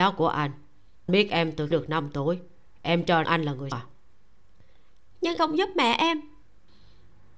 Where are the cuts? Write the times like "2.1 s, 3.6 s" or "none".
1.1 s, 1.7 s, 3.2 s, 3.7 s, 5.4 s